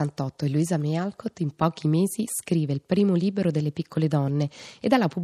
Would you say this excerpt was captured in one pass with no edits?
yes; 0 cuts

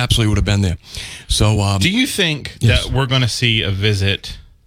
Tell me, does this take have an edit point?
no; 0 cuts

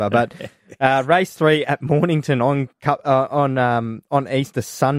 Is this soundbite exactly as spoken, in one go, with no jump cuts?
yes; 0 cuts

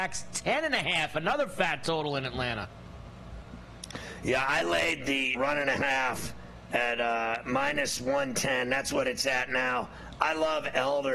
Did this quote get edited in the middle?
yes; 1 cut; at 5.3 s

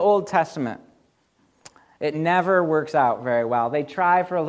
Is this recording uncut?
yes; 0 cuts

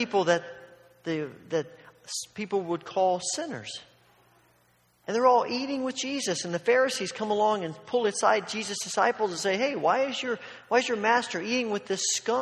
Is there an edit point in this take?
no; 0 cuts

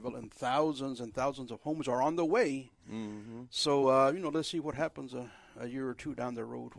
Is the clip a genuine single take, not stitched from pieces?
yes; 0 cuts

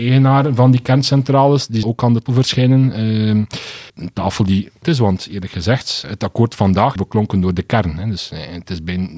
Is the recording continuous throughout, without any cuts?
no; 6 cuts; at 1.8 s, 2.3 s, 3.9 s, 4.8 s, 6.0 s, 7.0 s

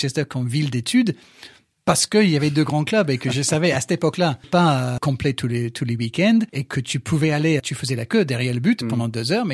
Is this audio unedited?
no; 4 cuts; at 4.4 s, 5.0 s, 6.5 s, 7.6 s

